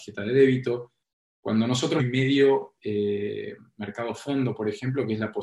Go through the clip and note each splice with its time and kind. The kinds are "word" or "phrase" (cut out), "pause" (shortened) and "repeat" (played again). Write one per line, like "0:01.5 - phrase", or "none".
0:02.0 - phrase

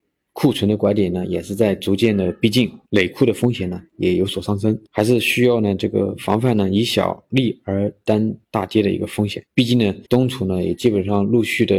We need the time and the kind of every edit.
0:02.8 - pause
0:04.9 - pause
0:08.4 - pause
0:09.5 - pause
0:10.0 - pause

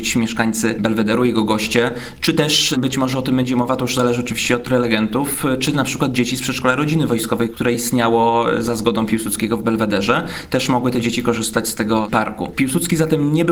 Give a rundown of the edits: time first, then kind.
none

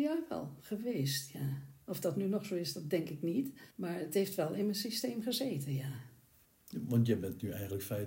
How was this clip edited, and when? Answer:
0:03.7 - pause
0:06.4 - pause

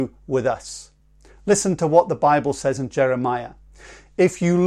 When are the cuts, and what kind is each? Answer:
none

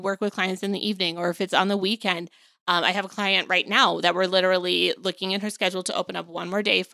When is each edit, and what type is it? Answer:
none

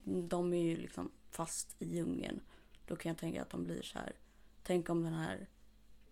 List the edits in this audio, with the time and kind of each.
none

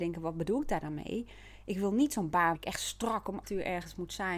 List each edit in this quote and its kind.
0:02.5 - word
0:03.4 - word

